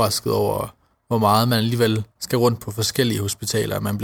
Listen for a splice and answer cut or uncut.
cut